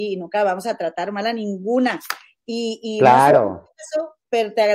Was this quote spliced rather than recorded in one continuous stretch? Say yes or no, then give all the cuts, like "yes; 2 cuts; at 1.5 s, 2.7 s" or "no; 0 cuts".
no; 0 cuts